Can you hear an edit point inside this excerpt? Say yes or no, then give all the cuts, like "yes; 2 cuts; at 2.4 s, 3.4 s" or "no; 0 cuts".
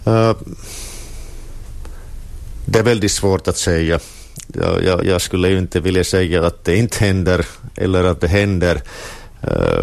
yes; 1 cut; at 5.0 s